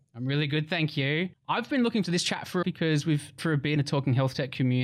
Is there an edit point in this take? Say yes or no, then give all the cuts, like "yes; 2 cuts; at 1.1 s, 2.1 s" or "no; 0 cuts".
yes; 4 cuts; at 2.0 s, 2.6 s, 3.4 s, 3.8 s